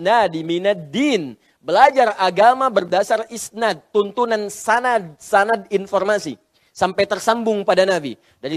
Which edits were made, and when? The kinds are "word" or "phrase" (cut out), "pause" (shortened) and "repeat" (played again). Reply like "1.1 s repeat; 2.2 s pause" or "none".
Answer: none